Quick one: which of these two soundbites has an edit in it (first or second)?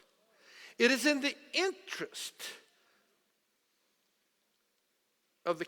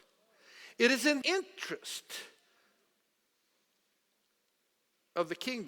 second